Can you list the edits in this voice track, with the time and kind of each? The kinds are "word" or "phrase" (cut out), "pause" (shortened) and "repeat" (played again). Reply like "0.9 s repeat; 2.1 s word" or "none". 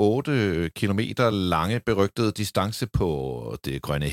none